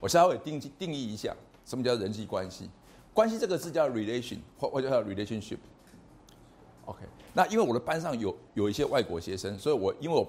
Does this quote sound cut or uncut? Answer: uncut